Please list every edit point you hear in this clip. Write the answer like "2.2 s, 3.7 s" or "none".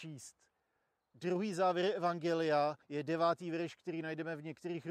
2.8 s